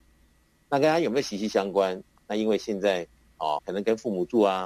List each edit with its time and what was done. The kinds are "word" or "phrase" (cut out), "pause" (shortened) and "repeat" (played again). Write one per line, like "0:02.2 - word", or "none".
0:03.6 - word